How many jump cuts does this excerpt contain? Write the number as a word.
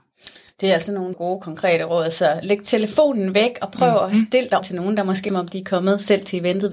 three